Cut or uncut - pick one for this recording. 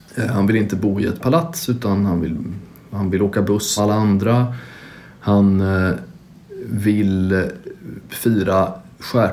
cut